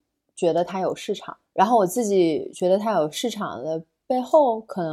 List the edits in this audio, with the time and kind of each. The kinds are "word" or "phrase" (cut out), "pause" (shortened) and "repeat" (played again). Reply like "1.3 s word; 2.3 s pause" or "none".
1.4 s pause